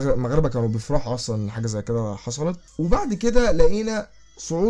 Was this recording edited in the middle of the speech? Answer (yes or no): no